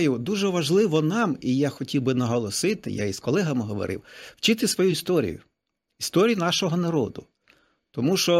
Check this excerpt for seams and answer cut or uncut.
uncut